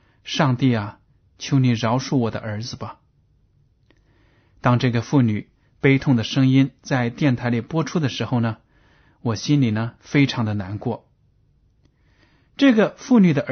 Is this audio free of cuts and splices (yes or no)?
yes